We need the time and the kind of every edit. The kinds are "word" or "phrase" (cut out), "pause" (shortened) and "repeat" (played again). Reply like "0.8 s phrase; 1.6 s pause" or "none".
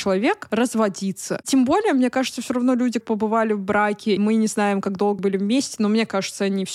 3.0 s word; 4.2 s word; 5.2 s word

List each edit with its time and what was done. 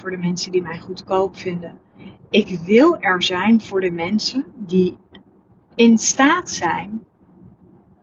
none

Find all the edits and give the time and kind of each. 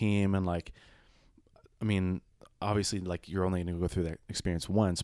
none

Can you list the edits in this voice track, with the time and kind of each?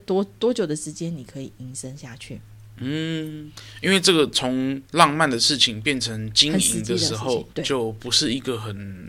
4.9 s pause; 7.5 s pause

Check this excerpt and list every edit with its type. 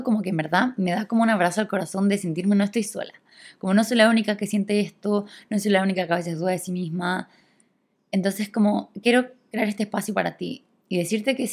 none

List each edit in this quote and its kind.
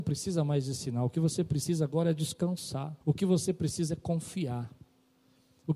3.0 s pause

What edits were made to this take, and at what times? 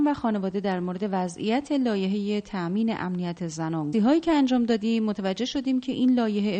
3.9 s phrase

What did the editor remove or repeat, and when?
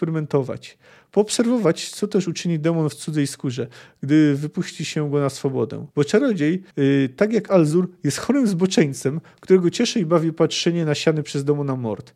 5.9 s pause; 6.7 s pause

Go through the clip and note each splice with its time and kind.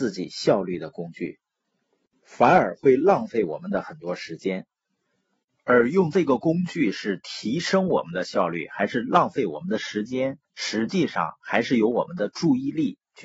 10.4 s pause

